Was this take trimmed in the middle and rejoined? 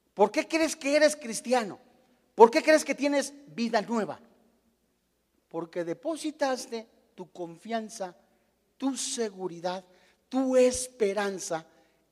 no; 0 cuts

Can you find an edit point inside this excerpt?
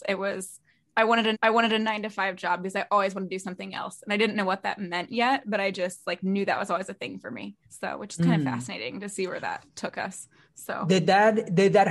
yes; 3 cuts; at 1.3 s, 7.6 s, 9.7 s

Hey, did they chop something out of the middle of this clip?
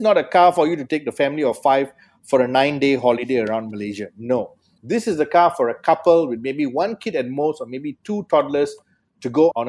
no; 0 cuts

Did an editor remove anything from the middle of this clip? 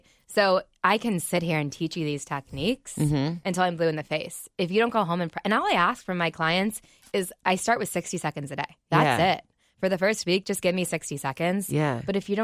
no; 0 cuts

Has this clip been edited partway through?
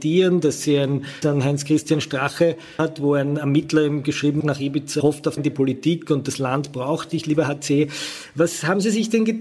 yes; 5 cuts; at 1.2 s, 2.8 s, 4.4 s, 5.0 s, 5.4 s

